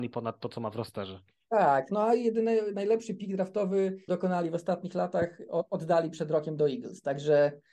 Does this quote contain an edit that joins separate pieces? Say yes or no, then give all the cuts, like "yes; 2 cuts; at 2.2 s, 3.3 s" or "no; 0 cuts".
yes; 1 cut; at 4.1 s